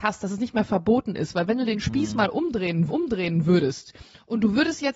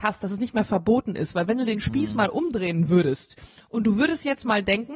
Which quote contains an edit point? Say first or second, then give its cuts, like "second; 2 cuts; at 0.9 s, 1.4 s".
first; 1 cut; at 2.9 s